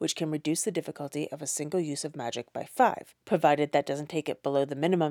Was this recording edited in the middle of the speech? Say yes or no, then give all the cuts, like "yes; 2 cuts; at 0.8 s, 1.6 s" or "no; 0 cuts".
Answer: yes; 1 cut; at 3.2 s